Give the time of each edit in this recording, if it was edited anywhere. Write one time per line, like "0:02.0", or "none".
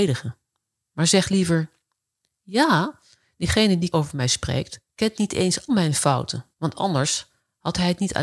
0:02.1
0:03.9
0:04.8
0:05.7
0:06.5